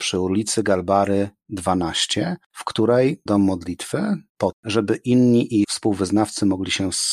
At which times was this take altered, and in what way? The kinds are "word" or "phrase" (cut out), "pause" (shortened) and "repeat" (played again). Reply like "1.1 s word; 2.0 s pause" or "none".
3.3 s word; 4.5 s word; 5.6 s word